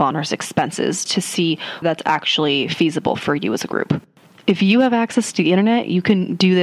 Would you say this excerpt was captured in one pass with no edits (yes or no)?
no